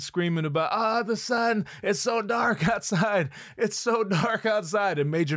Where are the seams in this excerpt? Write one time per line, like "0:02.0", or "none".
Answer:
none